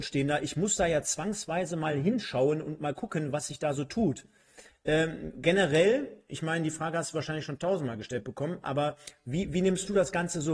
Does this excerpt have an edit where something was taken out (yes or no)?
no